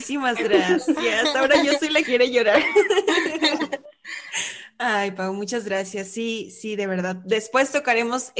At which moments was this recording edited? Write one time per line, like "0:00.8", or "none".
0:02.0